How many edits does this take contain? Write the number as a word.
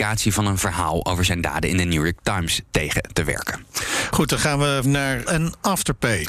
two